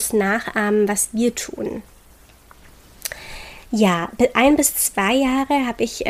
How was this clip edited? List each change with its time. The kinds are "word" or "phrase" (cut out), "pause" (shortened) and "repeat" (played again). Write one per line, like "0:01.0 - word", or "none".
0:03.6 - pause